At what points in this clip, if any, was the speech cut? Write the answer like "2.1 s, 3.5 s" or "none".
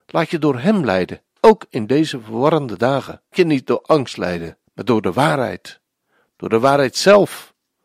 1.3 s, 3.3 s, 4.7 s